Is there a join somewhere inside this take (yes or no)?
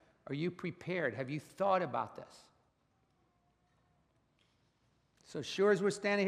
no